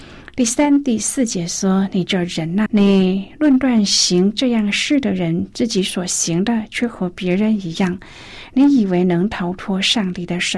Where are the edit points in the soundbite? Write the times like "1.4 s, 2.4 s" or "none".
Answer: 2.7 s